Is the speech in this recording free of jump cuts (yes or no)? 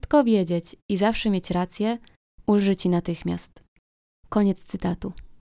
yes